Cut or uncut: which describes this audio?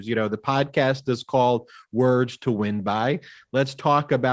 uncut